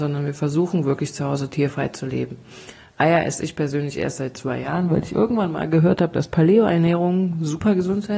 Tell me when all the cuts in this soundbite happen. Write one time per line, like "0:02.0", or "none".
none